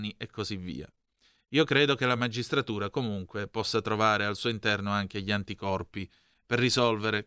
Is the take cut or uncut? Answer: uncut